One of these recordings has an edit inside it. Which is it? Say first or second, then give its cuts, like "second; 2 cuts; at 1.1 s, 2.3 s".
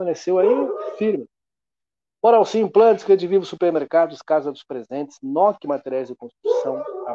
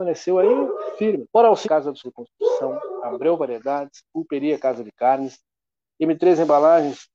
second; 3 cuts; at 1.3 s, 1.6 s, 2.0 s